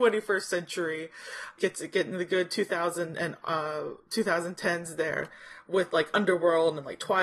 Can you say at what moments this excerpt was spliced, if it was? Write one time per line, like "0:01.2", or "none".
none